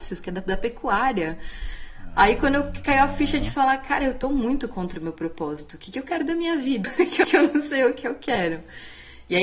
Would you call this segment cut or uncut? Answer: uncut